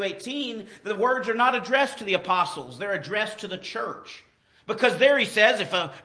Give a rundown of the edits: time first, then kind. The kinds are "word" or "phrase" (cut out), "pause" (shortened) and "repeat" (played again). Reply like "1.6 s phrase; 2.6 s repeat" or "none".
none